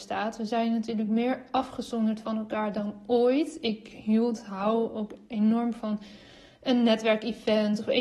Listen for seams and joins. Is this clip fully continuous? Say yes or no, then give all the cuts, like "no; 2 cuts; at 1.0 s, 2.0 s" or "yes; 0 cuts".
yes; 0 cuts